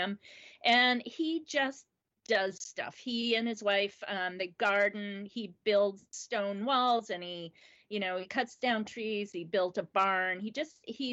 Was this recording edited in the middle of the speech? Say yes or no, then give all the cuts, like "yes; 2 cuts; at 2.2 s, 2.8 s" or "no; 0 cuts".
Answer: no; 0 cuts